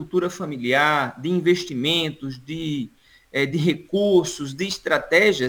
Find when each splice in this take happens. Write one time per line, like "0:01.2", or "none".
none